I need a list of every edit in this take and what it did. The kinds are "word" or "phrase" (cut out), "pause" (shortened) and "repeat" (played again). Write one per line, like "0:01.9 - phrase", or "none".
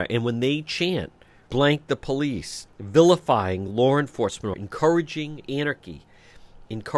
0:01.5 - word
0:02.7 - word
0:04.5 - word